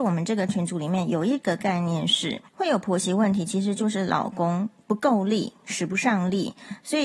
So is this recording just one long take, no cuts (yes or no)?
no